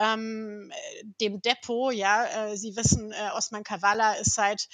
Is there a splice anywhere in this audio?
no; 0 cuts

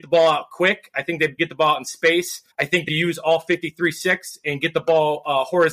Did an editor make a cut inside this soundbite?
yes; 3 cuts; at 1.4 s, 2.5 s, 2.9 s

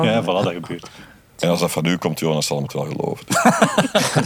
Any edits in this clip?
no; 0 cuts

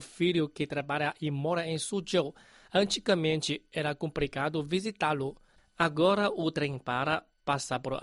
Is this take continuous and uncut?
yes; 0 cuts

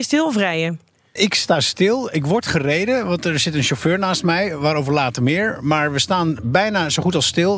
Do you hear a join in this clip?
yes; 1 cut; at 1.2 s

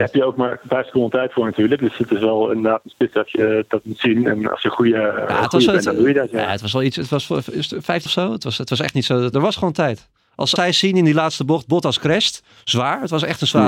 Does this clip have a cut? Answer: yes; 4 cuts; at 3.1 s, 8.1 s, 9.3 s, 10.6 s

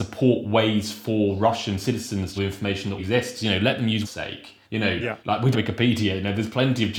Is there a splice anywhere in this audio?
yes; 6 cuts; at 2.4 s, 3.0 s, 4.0 s, 4.6 s, 5.2 s, 5.5 s

